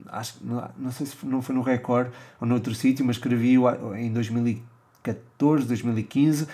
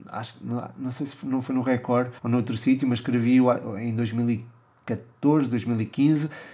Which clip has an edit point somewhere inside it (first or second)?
second